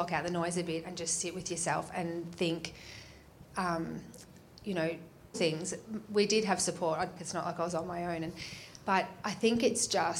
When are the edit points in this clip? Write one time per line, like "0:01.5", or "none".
0:03.4
0:05.3
0:07.2